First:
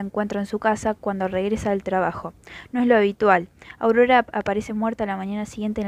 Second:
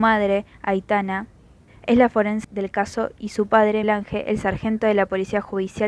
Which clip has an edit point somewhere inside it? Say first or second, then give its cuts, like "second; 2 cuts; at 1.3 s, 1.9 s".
second; 3 cuts; at 1.7 s, 2.4 s, 3.8 s